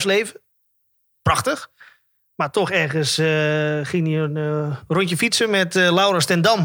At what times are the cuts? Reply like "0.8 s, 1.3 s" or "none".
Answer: none